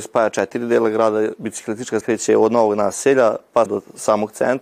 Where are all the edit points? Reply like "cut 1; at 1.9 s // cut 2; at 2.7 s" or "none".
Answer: cut 1; at 2.0 s // cut 2; at 3.7 s